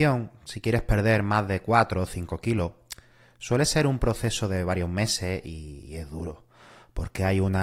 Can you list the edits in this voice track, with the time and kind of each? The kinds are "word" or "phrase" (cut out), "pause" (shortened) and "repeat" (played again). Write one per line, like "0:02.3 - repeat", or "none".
none